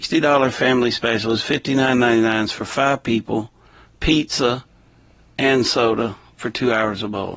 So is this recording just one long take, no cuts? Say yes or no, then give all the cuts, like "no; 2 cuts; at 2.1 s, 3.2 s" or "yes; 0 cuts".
yes; 0 cuts